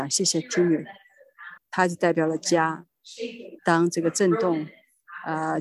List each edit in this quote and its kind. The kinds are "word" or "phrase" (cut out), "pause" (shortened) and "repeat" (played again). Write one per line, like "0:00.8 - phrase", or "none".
0:01.6 - pause
0:03.6 - pause